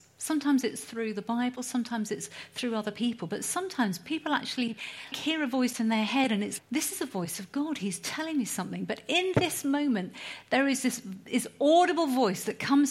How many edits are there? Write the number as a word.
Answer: two